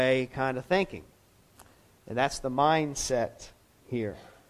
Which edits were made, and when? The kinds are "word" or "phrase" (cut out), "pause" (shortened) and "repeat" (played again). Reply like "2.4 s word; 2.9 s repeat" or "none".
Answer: none